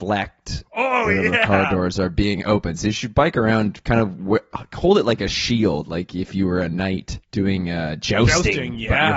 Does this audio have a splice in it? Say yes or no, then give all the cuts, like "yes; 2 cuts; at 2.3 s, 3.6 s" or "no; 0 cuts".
yes; 1 cut; at 7.2 s